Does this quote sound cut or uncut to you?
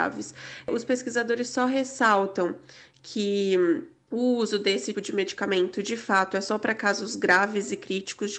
cut